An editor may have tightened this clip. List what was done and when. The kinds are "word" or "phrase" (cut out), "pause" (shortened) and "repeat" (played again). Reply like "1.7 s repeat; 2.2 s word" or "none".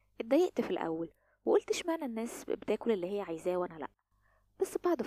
none